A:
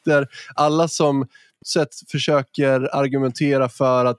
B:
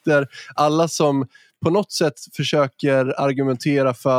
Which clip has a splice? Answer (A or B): A